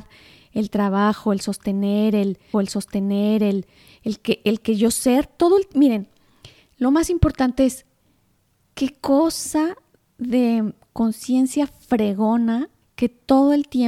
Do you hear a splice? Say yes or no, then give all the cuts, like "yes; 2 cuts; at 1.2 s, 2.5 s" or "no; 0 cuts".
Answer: yes; 2 cuts; at 2.5 s, 12.8 s